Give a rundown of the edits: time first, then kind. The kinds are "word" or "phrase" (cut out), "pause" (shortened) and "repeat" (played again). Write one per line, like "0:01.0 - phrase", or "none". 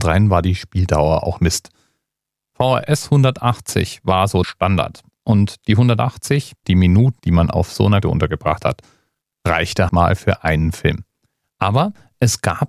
0:01.4 - word
0:04.4 - word
0:06.6 - word
0:07.2 - word
0:08.0 - word
0:09.9 - word